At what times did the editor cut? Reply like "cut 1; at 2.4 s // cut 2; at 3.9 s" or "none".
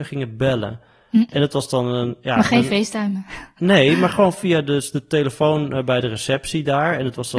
none